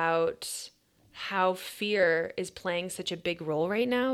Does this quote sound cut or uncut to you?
uncut